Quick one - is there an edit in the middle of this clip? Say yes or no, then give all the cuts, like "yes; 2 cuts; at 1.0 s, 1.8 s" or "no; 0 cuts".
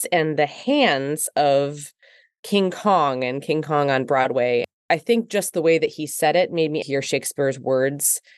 yes; 1 cut; at 6.8 s